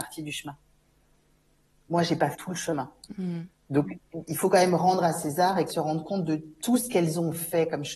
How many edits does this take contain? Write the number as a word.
two